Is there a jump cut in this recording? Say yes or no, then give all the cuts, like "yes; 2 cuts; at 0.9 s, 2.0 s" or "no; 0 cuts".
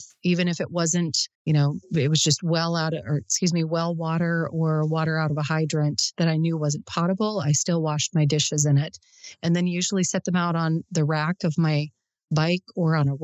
yes; 1 cut; at 1.3 s